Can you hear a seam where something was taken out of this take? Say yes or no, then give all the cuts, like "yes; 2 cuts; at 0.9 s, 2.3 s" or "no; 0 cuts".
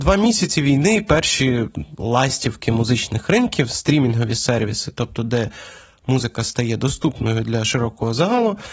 no; 0 cuts